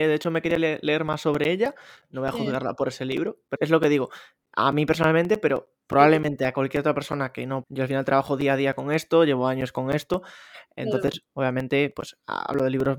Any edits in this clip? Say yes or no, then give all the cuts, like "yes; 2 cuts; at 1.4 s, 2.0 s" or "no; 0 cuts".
yes; 2 cuts; at 3.6 s, 7.6 s